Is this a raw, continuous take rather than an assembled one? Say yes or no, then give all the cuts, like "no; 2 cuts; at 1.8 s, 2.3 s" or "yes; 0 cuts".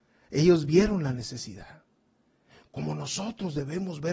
yes; 0 cuts